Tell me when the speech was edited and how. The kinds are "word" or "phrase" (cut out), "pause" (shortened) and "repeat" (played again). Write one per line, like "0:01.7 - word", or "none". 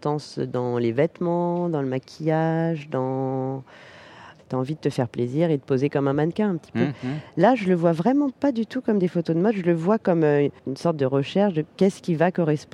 0:10.6 - pause